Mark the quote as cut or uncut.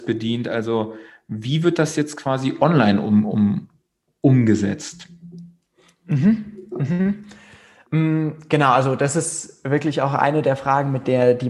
uncut